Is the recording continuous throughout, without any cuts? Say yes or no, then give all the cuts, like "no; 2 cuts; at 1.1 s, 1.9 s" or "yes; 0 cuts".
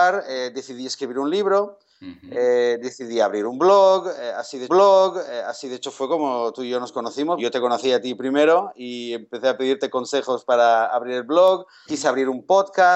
no; 3 cuts; at 4.7 s, 7.4 s, 11.9 s